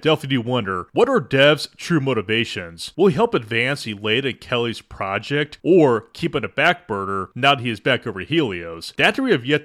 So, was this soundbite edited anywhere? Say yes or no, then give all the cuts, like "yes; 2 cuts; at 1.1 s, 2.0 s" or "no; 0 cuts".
no; 0 cuts